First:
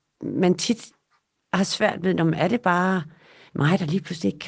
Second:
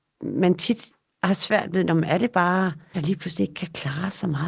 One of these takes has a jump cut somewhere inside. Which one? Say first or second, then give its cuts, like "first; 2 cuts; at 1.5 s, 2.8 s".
second; 2 cuts; at 1.1 s, 2.9 s